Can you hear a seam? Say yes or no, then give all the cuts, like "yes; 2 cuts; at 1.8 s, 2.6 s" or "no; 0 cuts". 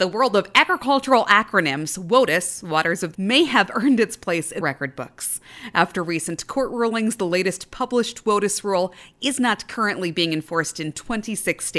yes; 2 cuts; at 3.1 s, 4.6 s